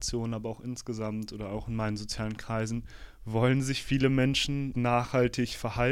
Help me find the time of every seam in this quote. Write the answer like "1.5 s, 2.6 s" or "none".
4.7 s